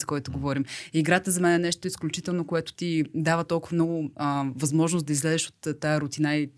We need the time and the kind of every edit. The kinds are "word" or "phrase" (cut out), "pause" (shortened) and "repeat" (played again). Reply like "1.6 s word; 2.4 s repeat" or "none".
none